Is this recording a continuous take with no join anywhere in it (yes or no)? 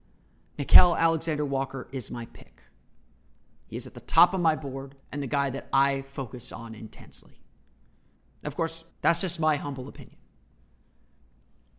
no